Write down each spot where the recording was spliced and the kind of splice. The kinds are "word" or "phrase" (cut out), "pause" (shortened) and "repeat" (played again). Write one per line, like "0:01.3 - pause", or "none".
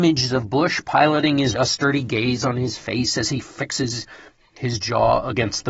0:01.5 - word